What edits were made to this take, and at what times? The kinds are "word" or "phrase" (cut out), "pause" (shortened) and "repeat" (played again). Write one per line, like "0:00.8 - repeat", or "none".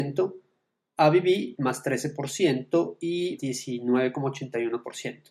0:01.5 - word
0:03.4 - phrase